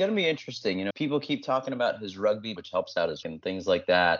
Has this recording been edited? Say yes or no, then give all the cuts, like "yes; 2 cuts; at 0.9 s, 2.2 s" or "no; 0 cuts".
yes; 3 cuts; at 0.9 s, 2.6 s, 3.2 s